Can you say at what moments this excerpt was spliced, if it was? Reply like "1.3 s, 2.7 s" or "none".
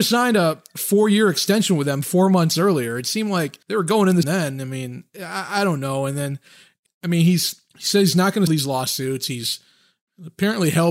3.6 s, 4.2 s, 6.9 s, 7.7 s, 8.5 s